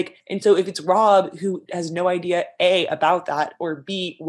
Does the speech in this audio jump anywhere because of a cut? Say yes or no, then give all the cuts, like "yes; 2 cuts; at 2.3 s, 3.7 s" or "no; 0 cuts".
no; 0 cuts